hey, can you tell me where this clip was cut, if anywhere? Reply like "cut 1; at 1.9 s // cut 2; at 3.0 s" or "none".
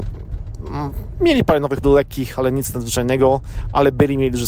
cut 1; at 1.8 s